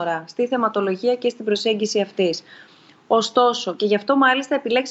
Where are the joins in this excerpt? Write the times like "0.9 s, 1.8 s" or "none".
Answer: none